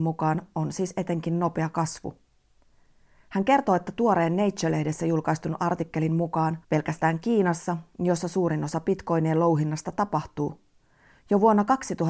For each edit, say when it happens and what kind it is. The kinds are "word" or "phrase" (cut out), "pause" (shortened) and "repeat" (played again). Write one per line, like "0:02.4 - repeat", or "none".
0:06.6 - pause